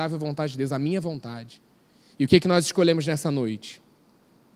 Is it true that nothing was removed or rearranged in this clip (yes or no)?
yes